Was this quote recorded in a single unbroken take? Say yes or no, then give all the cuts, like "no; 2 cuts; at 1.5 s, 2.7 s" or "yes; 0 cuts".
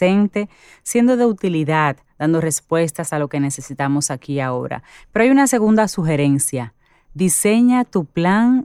yes; 0 cuts